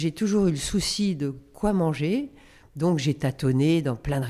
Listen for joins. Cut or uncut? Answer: uncut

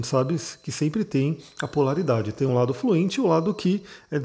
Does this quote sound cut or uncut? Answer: uncut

